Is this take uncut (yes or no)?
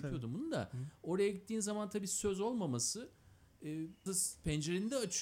no